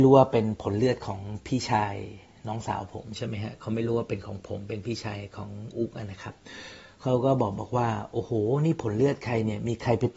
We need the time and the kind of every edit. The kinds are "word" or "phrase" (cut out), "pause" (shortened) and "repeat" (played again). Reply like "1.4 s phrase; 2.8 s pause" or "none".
none